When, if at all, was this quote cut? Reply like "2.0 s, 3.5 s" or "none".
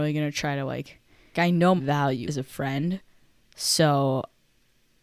1.3 s, 1.8 s, 2.3 s